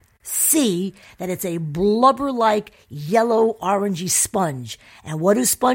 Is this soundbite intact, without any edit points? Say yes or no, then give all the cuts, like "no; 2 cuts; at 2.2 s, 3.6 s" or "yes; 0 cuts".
yes; 0 cuts